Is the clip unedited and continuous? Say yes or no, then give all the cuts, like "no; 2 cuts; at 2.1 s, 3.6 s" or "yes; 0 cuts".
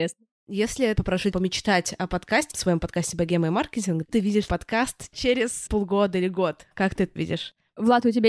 no; 7 cuts; at 1.0 s, 1.3 s, 2.5 s, 4.1 s, 4.5 s, 5.7 s, 7.2 s